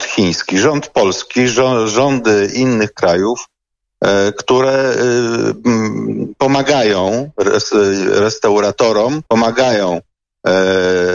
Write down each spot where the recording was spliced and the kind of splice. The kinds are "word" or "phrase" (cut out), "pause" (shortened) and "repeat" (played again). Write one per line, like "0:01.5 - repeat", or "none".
0:09.3 - pause